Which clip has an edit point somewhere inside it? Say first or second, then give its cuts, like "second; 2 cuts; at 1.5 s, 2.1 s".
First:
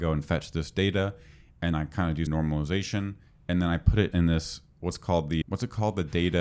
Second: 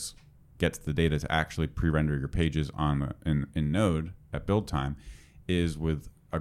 first; 4 cuts; at 1.7 s, 2.3 s, 4.1 s, 5.4 s